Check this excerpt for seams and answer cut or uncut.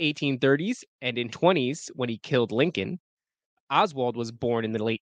cut